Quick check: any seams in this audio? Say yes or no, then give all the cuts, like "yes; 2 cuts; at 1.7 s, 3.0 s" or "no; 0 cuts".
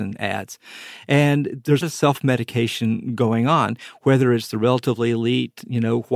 yes; 1 cut; at 1.8 s